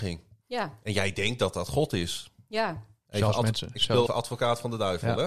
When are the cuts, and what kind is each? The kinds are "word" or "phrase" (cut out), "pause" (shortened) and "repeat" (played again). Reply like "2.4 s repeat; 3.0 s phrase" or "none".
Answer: 4.1 s word

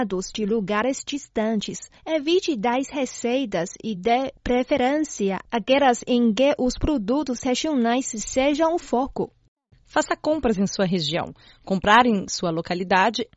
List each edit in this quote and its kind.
none

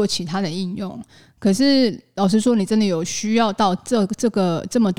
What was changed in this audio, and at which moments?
none

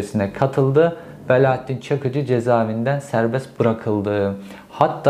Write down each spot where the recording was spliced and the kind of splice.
none

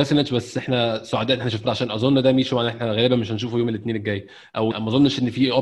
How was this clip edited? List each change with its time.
1.6 s word; 4.7 s word

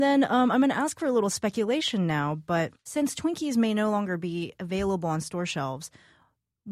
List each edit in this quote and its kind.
2.8 s pause

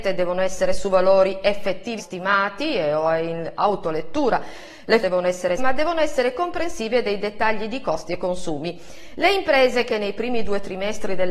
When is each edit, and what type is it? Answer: 2.0 s phrase; 5.0 s phrase; 5.6 s word

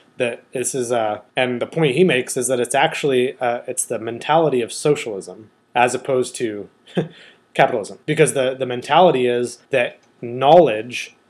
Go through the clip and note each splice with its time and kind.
1.3 s pause; 5.6 s pause; 8.0 s pause; 9.6 s pause

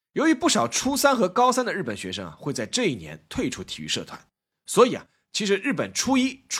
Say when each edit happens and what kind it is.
none

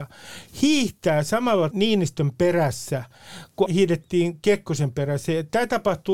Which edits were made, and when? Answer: 1.7 s phrase; 3.7 s word

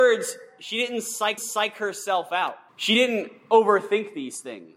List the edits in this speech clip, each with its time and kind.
1.4 s repeat; 2.7 s pause

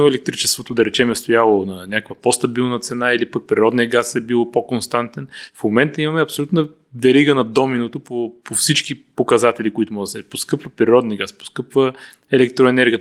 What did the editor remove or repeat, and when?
none

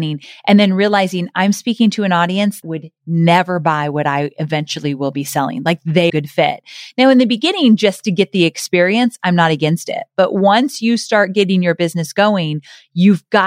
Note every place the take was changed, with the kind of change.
2.6 s word; 6.1 s phrase

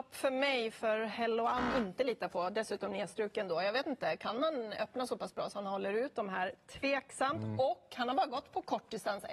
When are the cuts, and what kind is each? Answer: 1.7 s word

